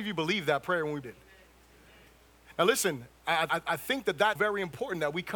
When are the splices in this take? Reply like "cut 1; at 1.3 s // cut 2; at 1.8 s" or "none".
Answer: cut 1; at 1.0 s // cut 2; at 3.5 s // cut 3; at 4.4 s

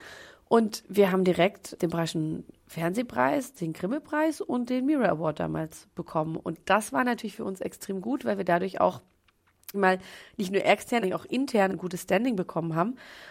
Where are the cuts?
cut 1; at 1.8 s // cut 2; at 9.7 s // cut 3; at 11.0 s // cut 4; at 11.7 s

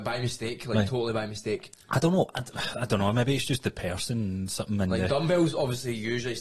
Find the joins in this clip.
none

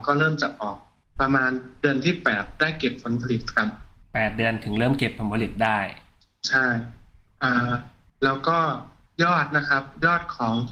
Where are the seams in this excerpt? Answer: none

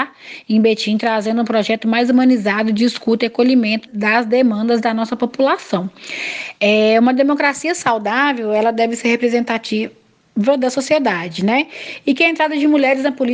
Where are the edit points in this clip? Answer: cut 1; at 3.9 s

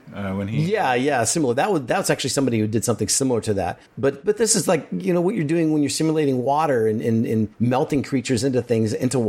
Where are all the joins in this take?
cut 1; at 3.9 s // cut 2; at 7.5 s

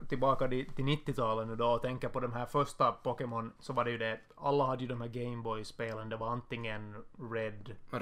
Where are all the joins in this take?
cut 1; at 3.6 s

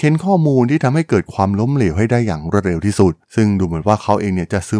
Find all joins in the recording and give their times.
cut 1; at 3.2 s

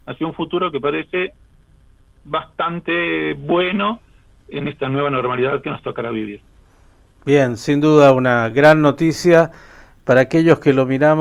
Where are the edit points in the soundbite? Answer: none

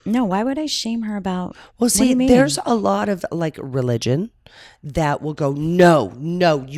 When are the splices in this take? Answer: none

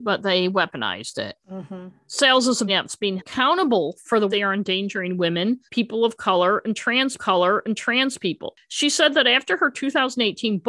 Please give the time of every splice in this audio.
cut 1; at 1.4 s // cut 2; at 2.7 s // cut 3; at 3.2 s // cut 4; at 4.3 s // cut 5; at 5.7 s // cut 6; at 7.2 s

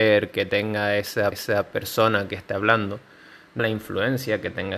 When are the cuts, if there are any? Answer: cut 1; at 1.3 s // cut 2; at 3.6 s

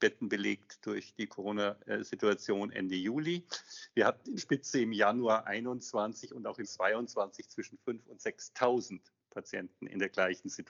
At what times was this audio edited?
cut 1; at 4.4 s // cut 2; at 6.6 s

